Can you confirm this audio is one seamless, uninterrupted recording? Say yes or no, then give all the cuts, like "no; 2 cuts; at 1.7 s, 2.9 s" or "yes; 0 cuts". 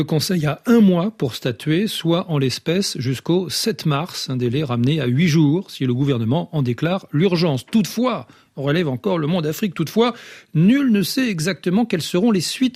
yes; 0 cuts